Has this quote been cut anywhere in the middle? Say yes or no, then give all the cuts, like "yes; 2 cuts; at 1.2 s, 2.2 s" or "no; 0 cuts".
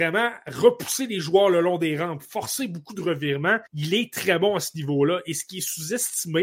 yes; 1 cut; at 3.7 s